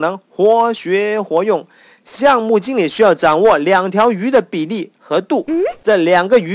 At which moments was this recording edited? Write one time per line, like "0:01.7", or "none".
none